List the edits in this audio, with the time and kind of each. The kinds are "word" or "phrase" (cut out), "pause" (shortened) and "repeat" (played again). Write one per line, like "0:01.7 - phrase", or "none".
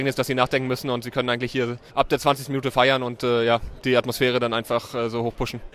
0:01.9 - pause